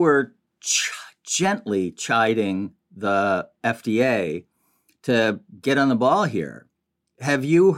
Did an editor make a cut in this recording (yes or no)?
no